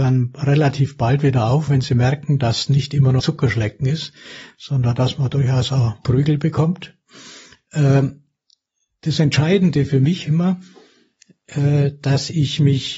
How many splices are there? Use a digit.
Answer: 3